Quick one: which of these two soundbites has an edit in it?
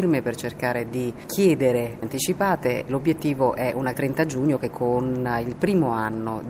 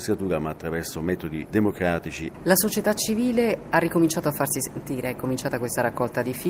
first; 4 cuts; at 2.0 s, 2.9 s, 3.9 s, 4.7 s

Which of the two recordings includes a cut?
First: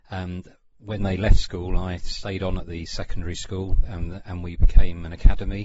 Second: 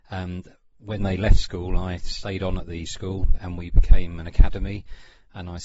second; 2 cuts; at 2.9 s, 3.4 s

